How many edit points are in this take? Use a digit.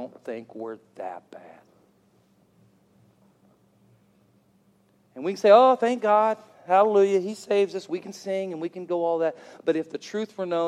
1